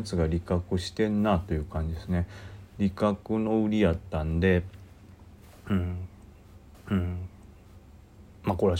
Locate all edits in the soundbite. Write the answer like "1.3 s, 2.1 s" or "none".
6.7 s